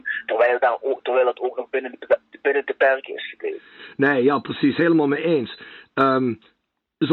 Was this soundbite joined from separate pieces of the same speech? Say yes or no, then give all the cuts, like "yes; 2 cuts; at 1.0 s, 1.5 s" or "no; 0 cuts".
no; 0 cuts